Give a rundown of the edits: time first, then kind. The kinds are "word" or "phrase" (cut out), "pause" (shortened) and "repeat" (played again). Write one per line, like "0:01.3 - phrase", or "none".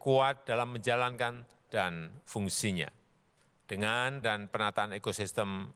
0:01.7 - word
0:04.2 - word

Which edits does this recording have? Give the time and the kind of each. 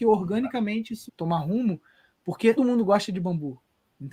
0:01.1 - word
0:02.6 - word

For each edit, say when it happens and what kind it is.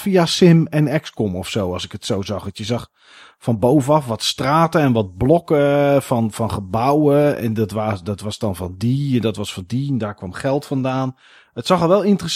none

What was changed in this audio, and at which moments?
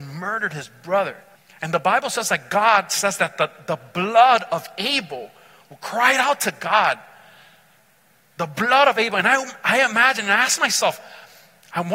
0:01.4 - pause

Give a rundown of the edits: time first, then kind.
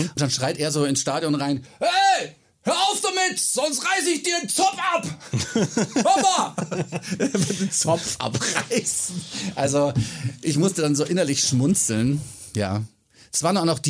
none

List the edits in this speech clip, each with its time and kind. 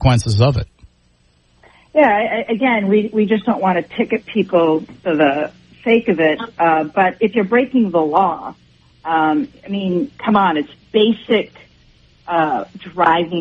none

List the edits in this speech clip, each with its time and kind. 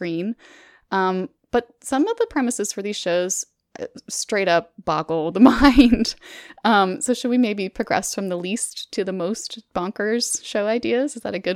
none

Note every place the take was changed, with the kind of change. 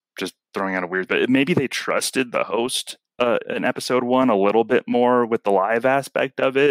0:01.1 - word
0:03.4 - word

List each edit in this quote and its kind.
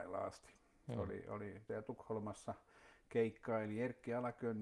0:01.7 - word

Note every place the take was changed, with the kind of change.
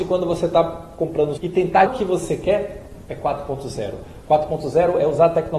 0:01.4 - word
0:01.9 - word
0:03.1 - word

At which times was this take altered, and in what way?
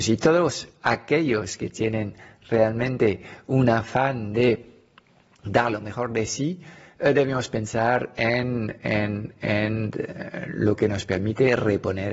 none

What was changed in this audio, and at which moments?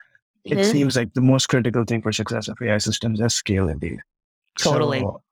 none

